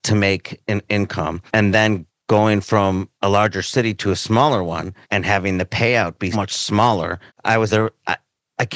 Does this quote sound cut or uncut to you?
cut